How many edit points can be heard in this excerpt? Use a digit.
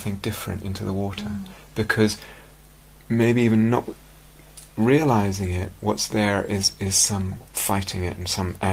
2